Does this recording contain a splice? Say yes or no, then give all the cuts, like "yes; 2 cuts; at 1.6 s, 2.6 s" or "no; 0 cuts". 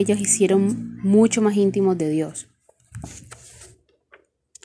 no; 0 cuts